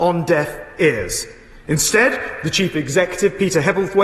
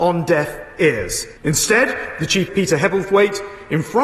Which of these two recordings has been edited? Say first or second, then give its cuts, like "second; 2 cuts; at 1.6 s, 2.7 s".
second; 2 cuts; at 1.4 s, 2.5 s